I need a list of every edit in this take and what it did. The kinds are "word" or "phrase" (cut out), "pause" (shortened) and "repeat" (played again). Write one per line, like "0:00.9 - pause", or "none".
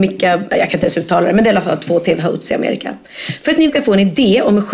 0:03.7 - word